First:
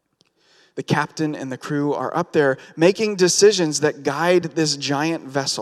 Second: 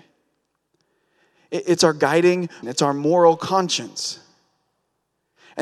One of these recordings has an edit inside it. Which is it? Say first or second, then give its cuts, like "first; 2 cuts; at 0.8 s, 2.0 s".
second; 1 cut; at 2.6 s